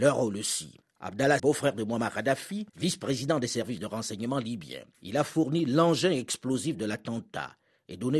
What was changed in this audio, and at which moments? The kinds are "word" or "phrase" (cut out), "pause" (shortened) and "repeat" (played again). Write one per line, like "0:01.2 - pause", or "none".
0:01.4 - word
0:02.7 - pause
0:04.9 - pause